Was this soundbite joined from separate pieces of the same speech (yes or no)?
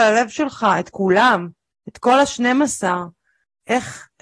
no